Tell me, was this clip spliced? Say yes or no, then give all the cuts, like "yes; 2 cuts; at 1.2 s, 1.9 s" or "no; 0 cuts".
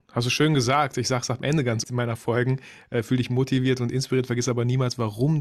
yes; 1 cut; at 1.8 s